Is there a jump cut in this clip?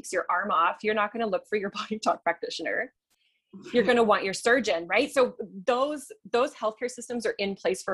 no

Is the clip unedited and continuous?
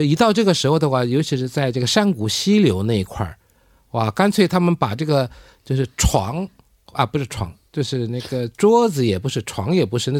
yes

